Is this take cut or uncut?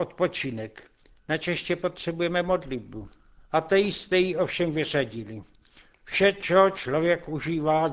uncut